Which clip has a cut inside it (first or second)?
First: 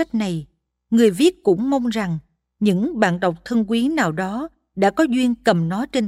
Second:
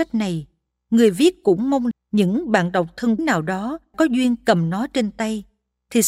second